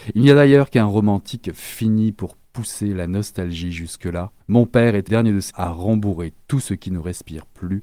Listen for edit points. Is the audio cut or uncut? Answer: cut